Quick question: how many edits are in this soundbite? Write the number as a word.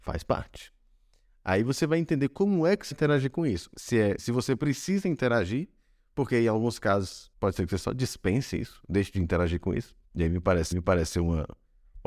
five